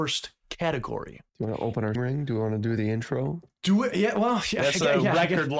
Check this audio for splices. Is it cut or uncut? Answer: cut